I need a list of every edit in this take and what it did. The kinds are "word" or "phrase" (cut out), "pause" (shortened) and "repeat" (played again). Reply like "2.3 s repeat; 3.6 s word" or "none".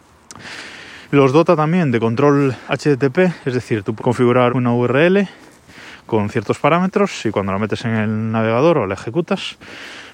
2.7 s word; 4.0 s word; 4.5 s word